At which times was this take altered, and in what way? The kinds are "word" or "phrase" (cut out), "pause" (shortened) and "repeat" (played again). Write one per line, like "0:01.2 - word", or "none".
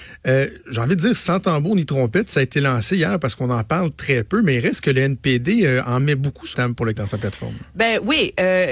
0:06.5 - word
0:07.0 - word